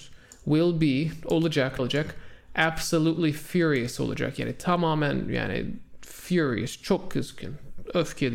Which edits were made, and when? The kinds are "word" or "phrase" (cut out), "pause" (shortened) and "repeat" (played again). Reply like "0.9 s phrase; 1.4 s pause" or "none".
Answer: 1.8 s word